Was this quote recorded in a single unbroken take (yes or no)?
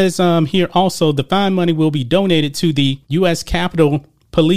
no